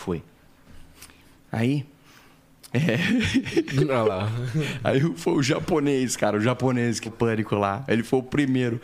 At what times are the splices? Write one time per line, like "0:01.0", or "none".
0:07.1